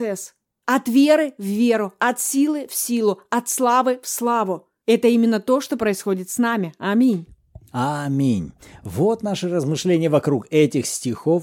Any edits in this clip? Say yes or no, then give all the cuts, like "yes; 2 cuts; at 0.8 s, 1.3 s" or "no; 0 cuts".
no; 0 cuts